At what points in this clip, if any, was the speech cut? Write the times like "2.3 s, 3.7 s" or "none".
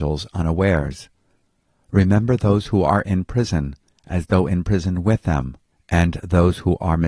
none

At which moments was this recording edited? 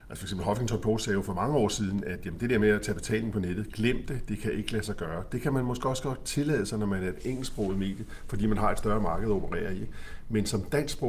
none

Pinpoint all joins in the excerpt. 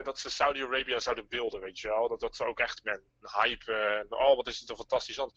2.2 s, 2.8 s

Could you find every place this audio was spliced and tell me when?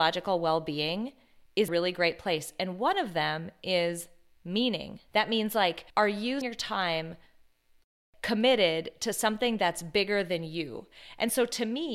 1.7 s, 5.1 s, 5.9 s, 6.4 s

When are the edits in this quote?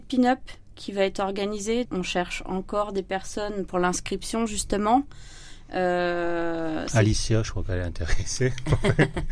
1.9 s

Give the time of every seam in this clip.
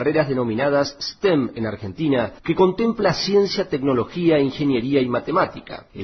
2.4 s

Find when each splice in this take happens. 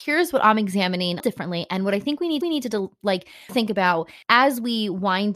1.2 s, 2.4 s, 3.5 s, 4.2 s

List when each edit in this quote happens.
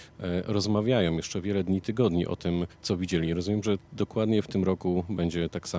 2.7 s

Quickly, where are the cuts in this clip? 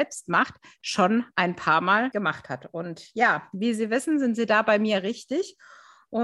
none

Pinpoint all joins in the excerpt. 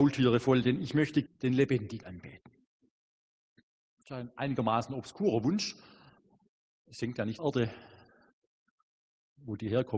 1.3 s, 2.0 s, 7.4 s

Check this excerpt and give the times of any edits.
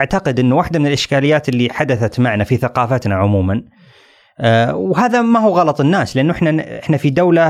none

